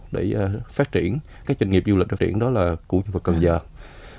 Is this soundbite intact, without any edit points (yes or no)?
no